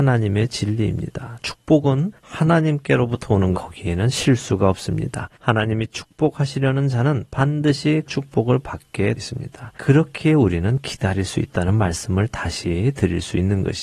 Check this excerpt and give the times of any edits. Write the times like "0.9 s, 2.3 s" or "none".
2.2 s, 3.5 s, 5.3 s, 8.0 s, 9.2 s, 9.8 s